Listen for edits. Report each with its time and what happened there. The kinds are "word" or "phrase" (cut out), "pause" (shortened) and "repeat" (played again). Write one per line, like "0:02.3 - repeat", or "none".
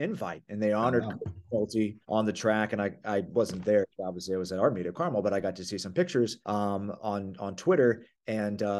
0:02.0 - pause
0:06.4 - pause